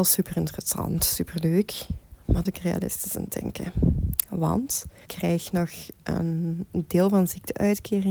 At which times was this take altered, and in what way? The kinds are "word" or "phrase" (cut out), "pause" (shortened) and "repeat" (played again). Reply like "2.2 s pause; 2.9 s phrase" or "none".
2.4 s phrase; 5.0 s word; 6.7 s word